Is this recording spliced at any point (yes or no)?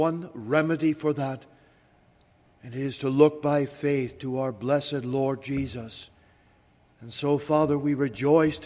no